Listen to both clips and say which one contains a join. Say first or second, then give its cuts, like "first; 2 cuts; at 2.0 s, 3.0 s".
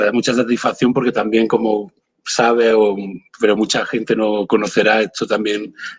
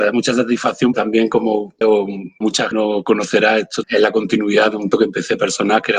second; 6 cuts; at 0.9 s, 1.8 s, 2.4 s, 2.7 s, 3.8 s, 4.9 s